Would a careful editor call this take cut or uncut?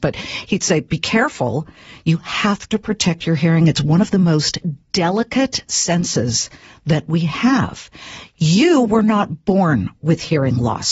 uncut